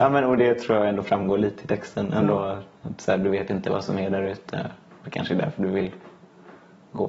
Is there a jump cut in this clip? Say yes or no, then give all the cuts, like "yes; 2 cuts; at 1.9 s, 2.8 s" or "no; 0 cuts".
no; 0 cuts